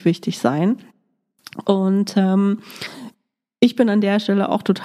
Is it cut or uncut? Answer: uncut